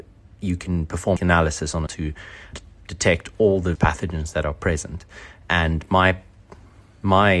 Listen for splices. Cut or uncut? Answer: cut